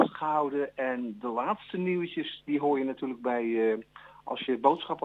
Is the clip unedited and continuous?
yes; 0 cuts

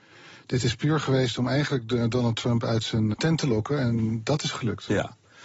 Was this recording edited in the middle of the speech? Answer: yes; 2 cuts; at 3.1 s, 4.5 s

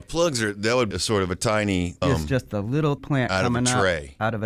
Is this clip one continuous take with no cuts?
no; 3 cuts; at 0.9 s, 2.0 s, 3.0 s

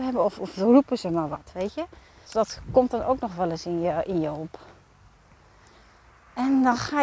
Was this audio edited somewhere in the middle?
yes; 1 cut; at 2.3 s

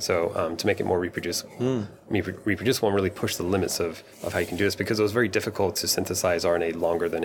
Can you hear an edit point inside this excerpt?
yes; 1 cut; at 4.1 s

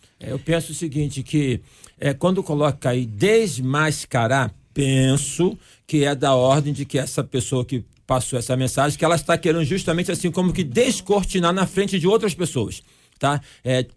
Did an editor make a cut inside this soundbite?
no; 0 cuts

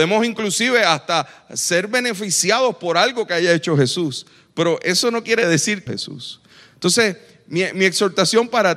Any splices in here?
yes; 1 cut; at 5.9 s

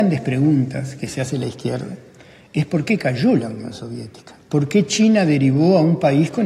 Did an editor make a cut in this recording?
no; 0 cuts

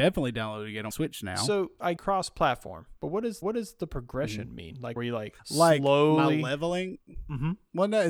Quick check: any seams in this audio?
yes; 6 cuts; at 0.9 s, 2.0 s, 3.0 s, 3.4 s, 5.0 s, 5.4 s

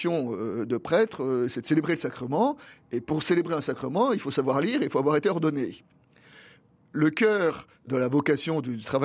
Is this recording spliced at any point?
no; 0 cuts

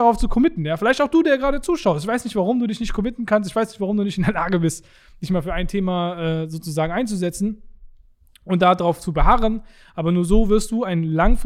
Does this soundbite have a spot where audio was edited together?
no; 0 cuts

